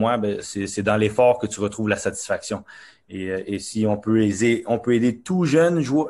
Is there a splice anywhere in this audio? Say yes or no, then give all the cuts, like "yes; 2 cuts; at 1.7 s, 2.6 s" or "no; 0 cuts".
no; 0 cuts